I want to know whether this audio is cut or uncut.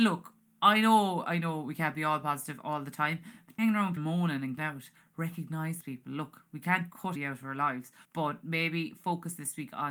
cut